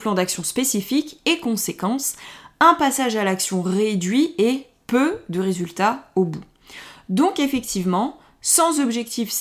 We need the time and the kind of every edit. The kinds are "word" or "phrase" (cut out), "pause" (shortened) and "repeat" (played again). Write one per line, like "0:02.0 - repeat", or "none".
none